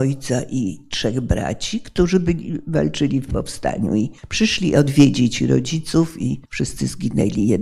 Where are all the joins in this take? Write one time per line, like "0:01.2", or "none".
0:04.2
0:06.4

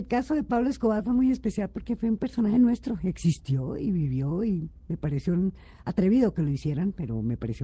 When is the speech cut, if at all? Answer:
none

